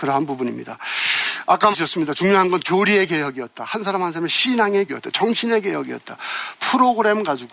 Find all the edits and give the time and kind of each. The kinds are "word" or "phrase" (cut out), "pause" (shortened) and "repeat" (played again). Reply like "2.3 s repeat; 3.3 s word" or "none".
1.7 s word; 4.9 s word